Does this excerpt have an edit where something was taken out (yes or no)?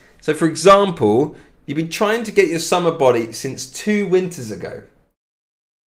no